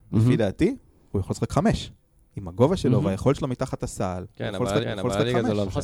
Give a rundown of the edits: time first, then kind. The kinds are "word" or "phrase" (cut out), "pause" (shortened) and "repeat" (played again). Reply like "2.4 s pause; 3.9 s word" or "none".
4.8 s repeat